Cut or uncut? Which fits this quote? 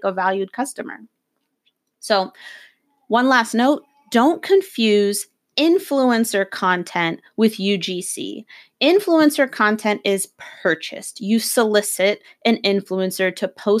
uncut